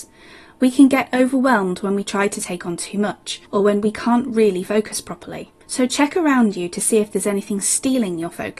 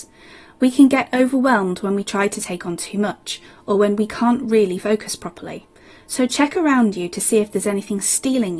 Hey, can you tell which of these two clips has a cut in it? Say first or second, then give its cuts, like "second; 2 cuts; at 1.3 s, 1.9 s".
first; 2 cuts; at 3.4 s, 5.6 s